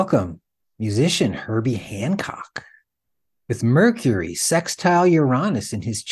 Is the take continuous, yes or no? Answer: yes